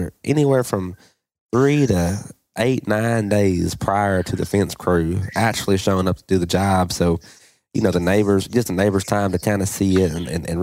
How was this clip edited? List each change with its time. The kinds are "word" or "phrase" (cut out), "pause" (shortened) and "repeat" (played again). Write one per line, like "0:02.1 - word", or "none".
none